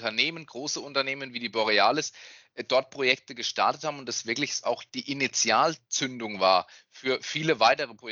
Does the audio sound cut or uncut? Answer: uncut